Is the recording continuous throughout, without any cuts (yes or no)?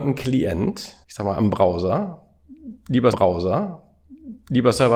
no